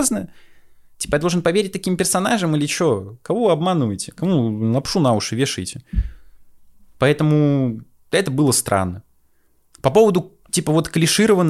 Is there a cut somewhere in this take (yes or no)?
no